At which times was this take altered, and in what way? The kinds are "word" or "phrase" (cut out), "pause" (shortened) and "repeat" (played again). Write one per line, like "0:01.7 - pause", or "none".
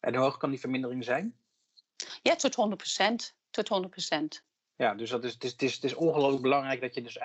none